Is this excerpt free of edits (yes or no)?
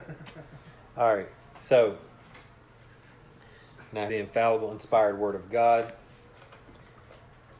no